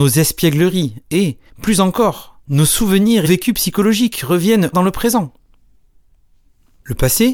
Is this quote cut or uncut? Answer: cut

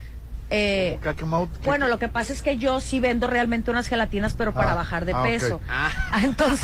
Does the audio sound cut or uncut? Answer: uncut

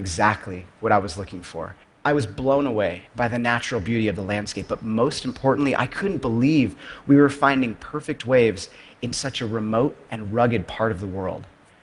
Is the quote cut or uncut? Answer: cut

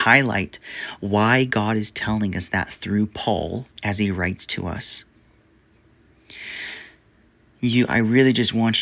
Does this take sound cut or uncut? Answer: cut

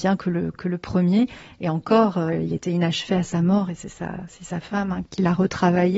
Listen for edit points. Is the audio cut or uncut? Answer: uncut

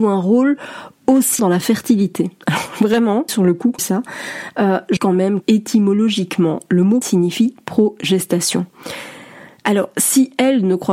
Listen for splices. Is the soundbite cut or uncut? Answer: cut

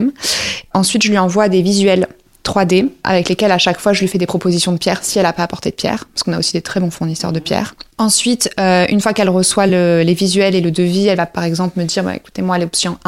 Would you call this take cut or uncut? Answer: uncut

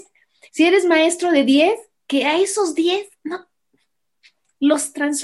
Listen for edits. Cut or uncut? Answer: uncut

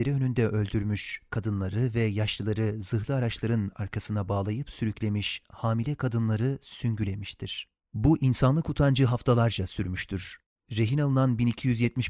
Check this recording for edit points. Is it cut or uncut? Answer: cut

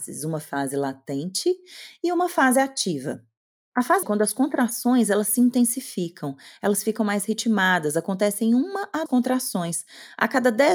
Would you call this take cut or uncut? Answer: cut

